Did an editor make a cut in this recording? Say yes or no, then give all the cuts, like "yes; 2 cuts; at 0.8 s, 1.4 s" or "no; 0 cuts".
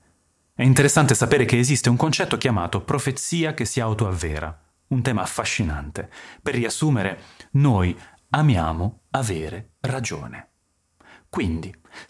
no; 0 cuts